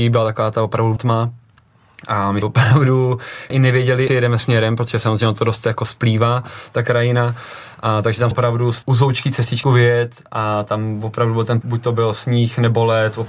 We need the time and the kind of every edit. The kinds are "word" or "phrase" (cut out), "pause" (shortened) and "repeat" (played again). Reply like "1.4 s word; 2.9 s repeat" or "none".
1.0 s word; 2.4 s word; 3.5 s word; 4.1 s word; 4.4 s word; 8.3 s word; 8.8 s word; 9.6 s word; 11.6 s word